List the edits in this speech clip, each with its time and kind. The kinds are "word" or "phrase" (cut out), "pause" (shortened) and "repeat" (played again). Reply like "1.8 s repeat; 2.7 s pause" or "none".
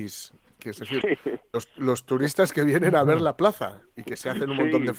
1.0 s word

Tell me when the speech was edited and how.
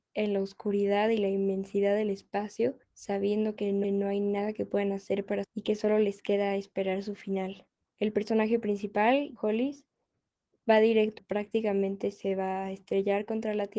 2.8 s pause; 3.8 s repeat; 5.4 s word; 7.8 s pause; 9.4 s word; 11.2 s phrase

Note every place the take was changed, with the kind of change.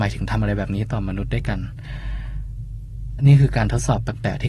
3.2 s phrase

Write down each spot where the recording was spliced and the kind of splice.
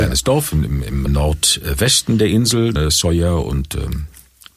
1.1 s word; 2.8 s word

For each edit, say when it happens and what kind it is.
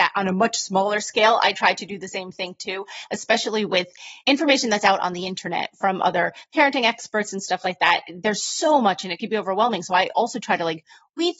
4.2 s pause

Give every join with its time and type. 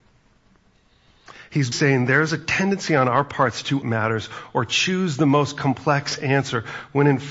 1.7 s word; 3.8 s word

